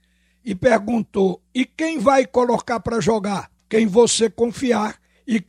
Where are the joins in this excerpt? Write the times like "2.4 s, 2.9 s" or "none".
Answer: 3.6 s